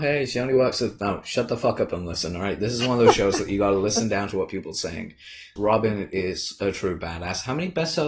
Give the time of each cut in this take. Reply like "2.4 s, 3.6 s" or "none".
5.6 s